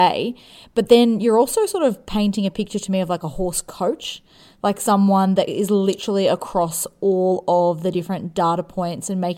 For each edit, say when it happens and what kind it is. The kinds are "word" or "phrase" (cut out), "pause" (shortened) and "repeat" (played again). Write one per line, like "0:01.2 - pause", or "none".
none